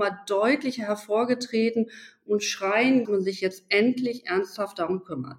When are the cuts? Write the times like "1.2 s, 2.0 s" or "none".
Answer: 3.0 s